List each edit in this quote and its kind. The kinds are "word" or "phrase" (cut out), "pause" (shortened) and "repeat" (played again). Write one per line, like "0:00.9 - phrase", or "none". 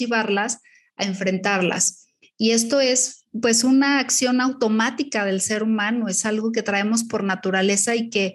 none

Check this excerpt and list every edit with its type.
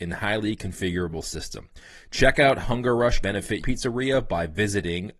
0:02.6 - word
0:03.2 - word
0:03.6 - word

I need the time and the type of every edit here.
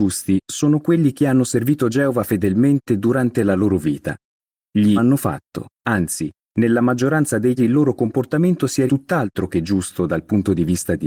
0:05.0 - phrase
0:05.7 - pause
0:07.6 - word
0:08.9 - word

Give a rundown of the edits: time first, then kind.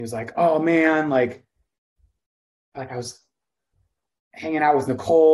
0:02.7 - phrase

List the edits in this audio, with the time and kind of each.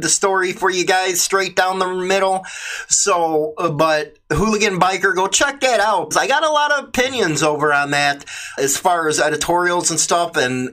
0:06.1 - word
0:08.6 - word

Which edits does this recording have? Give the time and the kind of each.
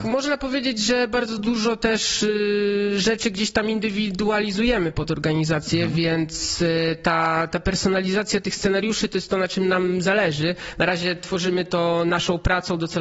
none

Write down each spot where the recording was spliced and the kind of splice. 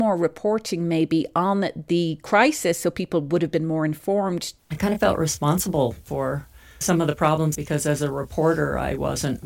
0:06.8 - word
0:07.5 - phrase

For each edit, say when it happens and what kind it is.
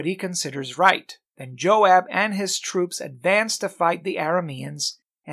0:01.3 - pause

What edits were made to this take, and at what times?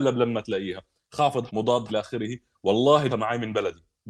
0:01.5 - word
0:01.9 - word
0:03.1 - word

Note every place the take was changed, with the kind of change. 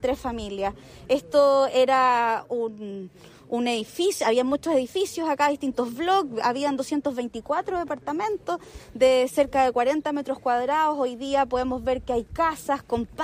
none

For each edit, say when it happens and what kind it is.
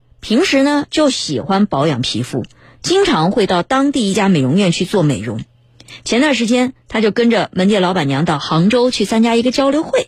none

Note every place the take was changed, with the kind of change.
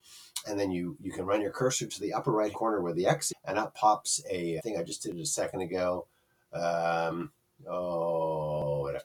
0:02.5 - word
0:03.3 - word
0:04.6 - word

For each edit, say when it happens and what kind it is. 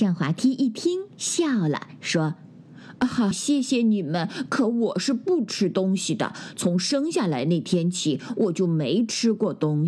0:03.3 - word

